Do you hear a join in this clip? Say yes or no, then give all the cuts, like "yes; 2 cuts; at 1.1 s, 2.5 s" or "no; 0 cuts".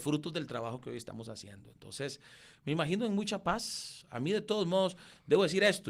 no; 0 cuts